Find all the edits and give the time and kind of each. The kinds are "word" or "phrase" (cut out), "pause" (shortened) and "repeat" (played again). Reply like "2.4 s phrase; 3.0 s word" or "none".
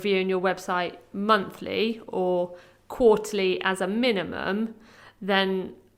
none